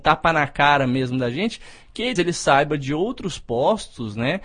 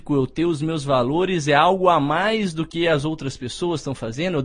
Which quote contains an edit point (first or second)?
first